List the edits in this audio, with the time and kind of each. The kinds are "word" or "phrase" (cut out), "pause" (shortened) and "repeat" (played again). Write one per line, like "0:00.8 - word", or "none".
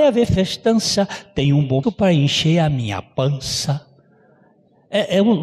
0:01.8 - word